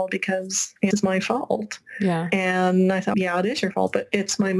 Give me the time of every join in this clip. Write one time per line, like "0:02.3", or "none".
0:00.9
0:03.1